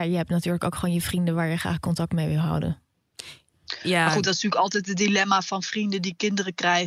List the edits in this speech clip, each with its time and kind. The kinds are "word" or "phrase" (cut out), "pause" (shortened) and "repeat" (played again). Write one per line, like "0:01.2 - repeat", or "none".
none